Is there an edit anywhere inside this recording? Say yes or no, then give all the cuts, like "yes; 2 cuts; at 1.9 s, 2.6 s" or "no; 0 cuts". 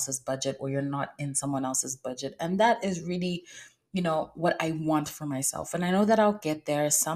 no; 0 cuts